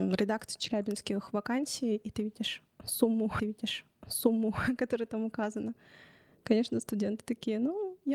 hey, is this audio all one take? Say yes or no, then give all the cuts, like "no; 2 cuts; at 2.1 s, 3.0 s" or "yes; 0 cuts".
no; 1 cut; at 3.4 s